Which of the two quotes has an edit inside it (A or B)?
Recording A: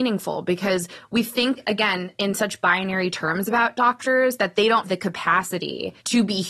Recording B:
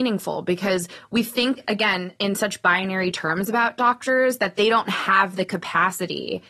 A